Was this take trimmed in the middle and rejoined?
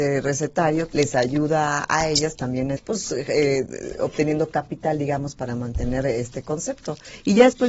yes; 2 cuts; at 0.9 s, 2.8 s

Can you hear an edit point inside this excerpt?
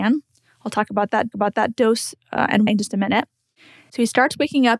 yes; 2 cuts; at 1.3 s, 2.7 s

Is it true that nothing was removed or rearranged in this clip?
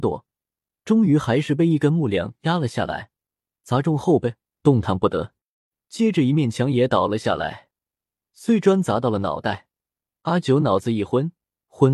yes; 0 cuts

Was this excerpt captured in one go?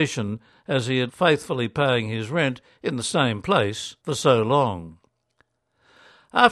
no; 2 cuts; at 1.1 s, 4.0 s

